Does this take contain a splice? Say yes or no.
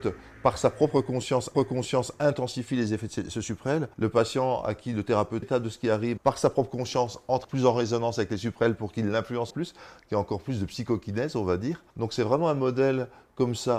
yes